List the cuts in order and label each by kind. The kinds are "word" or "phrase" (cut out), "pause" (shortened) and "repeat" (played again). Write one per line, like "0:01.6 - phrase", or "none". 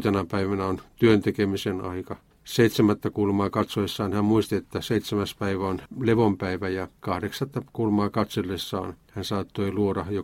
0:02.3 - pause
0:07.0 - pause

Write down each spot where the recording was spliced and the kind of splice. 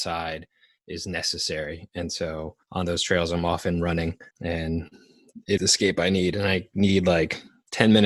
0:02.6 - pause
0:04.3 - pause
0:05.6 - word

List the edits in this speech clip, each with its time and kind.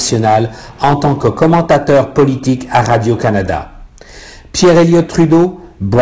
none

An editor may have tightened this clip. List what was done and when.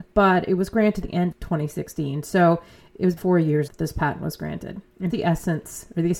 0:01.0 - word
0:01.3 - word
0:03.2 - word
0:03.7 - word
0:05.1 - word

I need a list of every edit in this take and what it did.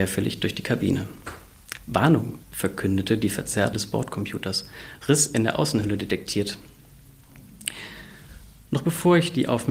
0:02.4 - pause
0:03.7 - word

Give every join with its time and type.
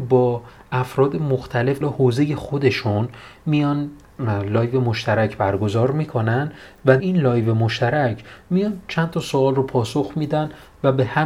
0:01.8 - word
0:07.0 - word

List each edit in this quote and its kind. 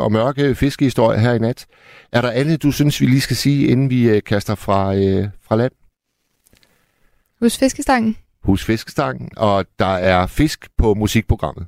none

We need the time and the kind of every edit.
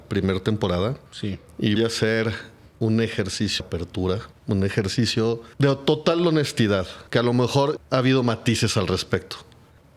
0:01.1 - pause
0:01.8 - word
0:03.6 - word
0:04.3 - pause
0:05.5 - pause
0:07.1 - pause
0:07.8 - word

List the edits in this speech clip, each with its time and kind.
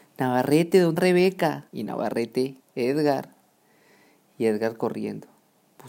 0:01.0 - word
0:01.7 - pause
0:02.6 - word

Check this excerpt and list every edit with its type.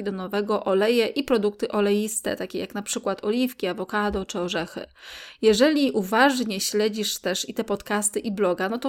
none

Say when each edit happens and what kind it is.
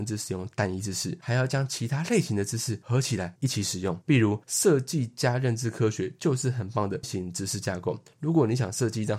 0:07.0 - word

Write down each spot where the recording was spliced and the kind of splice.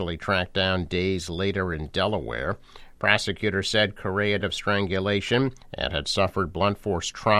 0:04.4 - word
0:05.6 - pause

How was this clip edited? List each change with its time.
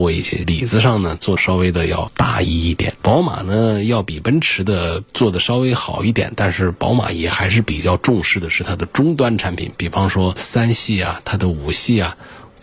0:05.1 - pause

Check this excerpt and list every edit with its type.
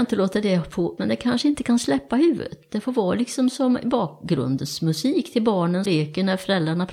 0:01.0 - word
0:05.9 - word

